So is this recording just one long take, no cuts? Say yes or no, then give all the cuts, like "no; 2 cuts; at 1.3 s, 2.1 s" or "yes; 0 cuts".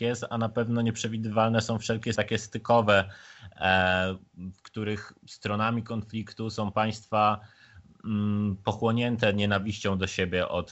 no; 2 cuts; at 2.1 s, 5.2 s